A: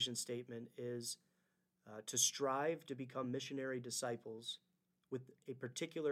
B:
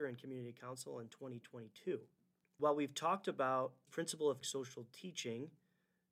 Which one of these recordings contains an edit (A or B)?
B